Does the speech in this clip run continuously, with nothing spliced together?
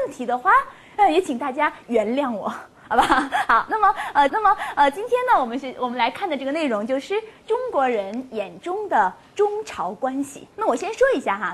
no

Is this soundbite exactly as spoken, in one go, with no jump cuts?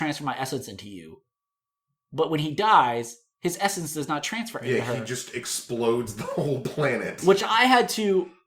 yes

